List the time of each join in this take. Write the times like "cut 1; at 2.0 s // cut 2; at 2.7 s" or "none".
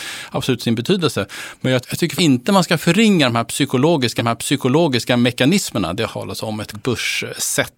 cut 1; at 1.8 s // cut 2; at 2.2 s // cut 3; at 4.2 s // cut 4; at 6.1 s // cut 5; at 6.7 s